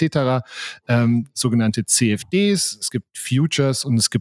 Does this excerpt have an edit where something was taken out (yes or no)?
no